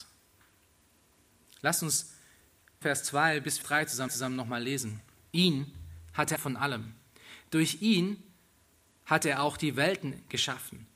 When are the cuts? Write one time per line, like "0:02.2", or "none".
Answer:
0:02.8
0:03.6
0:04.1
0:06.4